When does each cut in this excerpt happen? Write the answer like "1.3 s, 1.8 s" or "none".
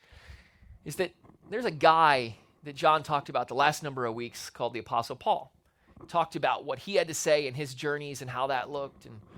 none